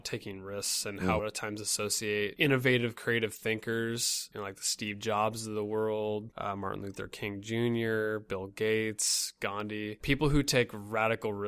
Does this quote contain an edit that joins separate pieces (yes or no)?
yes